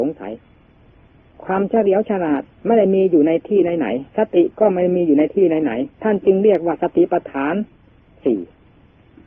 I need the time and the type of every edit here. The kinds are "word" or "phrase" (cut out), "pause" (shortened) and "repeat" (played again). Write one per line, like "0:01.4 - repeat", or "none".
0:02.5 - pause
0:04.1 - pause
0:05.9 - pause